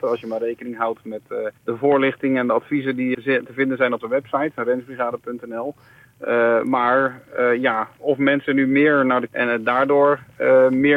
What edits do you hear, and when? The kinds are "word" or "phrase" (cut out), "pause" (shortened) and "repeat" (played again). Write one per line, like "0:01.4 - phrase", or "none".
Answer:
0:01.6 - pause
0:03.1 - word
0:04.0 - word
0:08.0 - word
0:09.3 - phrase